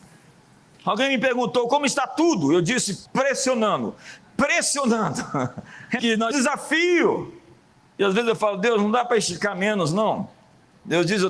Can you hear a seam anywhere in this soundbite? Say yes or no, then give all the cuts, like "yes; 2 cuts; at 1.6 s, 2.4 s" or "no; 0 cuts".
yes; 3 cuts; at 3.0 s, 6.0 s, 6.3 s